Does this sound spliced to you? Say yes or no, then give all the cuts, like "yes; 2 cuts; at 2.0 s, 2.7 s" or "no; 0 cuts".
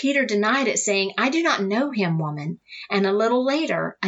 no; 0 cuts